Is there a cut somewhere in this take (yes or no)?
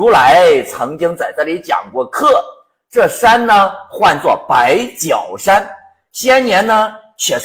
no